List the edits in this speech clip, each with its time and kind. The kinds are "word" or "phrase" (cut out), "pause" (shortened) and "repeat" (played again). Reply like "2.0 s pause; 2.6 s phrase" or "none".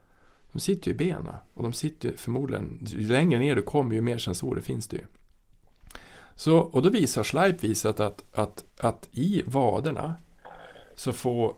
8.7 s pause